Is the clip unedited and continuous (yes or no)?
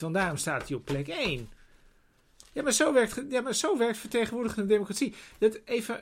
yes